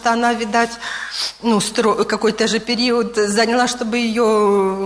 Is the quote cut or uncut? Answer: uncut